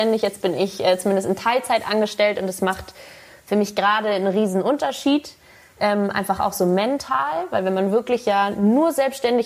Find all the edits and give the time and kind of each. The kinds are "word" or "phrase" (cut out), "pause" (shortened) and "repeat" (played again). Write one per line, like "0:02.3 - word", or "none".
none